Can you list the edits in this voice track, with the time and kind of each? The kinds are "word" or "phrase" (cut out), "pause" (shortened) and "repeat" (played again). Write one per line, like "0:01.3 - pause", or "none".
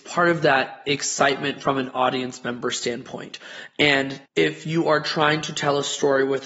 0:04.3 - pause